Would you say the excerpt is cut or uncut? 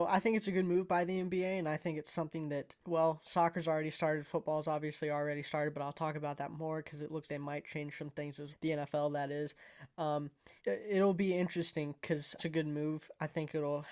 cut